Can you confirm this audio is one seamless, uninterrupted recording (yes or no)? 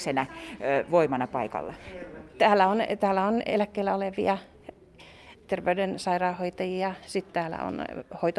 yes